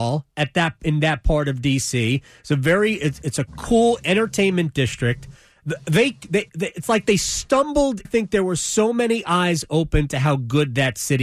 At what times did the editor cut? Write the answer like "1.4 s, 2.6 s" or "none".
8.0 s